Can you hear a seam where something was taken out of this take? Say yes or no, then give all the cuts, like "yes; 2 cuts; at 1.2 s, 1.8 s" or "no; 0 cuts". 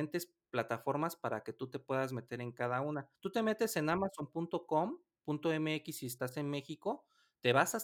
yes; 1 cut; at 3.1 s